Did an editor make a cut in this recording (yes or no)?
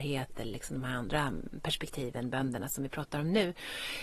no